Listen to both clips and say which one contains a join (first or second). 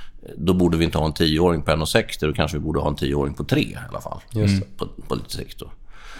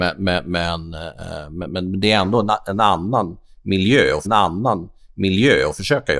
second